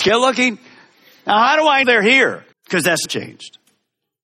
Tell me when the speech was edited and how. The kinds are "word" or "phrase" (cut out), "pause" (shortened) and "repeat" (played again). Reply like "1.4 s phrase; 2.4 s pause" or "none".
1.8 s word; 2.5 s pause; 3.1 s word